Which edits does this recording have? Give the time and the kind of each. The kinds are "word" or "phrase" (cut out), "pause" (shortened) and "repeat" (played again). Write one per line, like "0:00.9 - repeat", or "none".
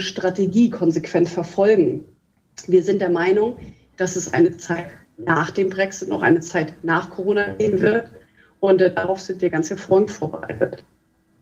none